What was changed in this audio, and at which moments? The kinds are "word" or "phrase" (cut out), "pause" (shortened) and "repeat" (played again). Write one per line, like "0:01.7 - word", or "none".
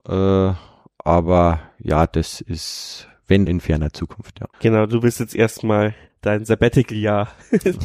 0:03.5 - word
0:04.5 - pause
0:06.1 - pause